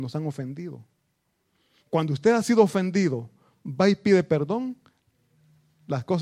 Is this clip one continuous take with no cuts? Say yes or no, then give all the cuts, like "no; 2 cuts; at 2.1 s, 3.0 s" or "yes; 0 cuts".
yes; 0 cuts